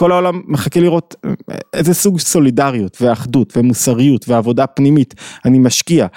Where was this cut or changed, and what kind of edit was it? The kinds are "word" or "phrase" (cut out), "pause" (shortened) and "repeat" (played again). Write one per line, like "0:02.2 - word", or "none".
none